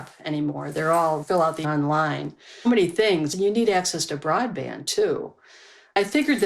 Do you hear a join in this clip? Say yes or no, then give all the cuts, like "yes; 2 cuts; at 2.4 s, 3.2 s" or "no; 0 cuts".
yes; 2 cuts; at 1.6 s, 2.6 s